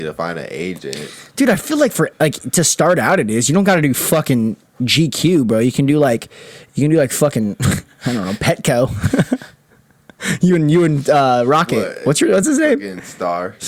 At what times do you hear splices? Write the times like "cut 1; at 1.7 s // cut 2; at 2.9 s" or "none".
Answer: none